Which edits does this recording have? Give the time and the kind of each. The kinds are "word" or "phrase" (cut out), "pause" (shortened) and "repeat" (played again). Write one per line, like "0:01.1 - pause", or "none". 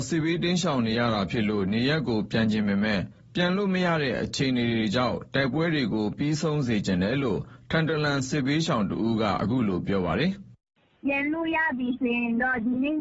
none